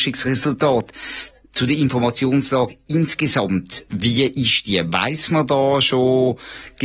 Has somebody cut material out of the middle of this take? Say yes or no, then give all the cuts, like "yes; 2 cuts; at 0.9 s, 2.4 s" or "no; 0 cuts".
no; 0 cuts